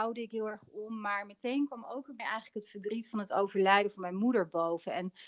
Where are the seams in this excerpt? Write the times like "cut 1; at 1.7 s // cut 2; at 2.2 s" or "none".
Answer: cut 1; at 2.2 s